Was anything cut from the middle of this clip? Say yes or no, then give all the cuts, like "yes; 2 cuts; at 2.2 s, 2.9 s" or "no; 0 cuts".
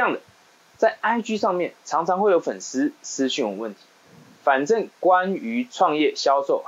no; 0 cuts